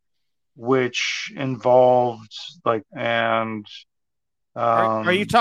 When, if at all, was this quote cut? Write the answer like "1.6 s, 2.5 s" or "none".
2.9 s